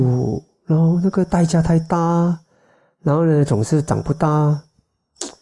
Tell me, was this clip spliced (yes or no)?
no